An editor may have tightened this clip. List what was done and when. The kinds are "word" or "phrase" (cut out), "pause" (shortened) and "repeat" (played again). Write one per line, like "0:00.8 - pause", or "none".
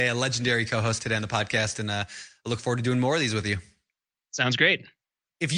none